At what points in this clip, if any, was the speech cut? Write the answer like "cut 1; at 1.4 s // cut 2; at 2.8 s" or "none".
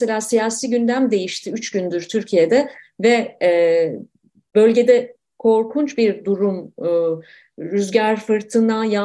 none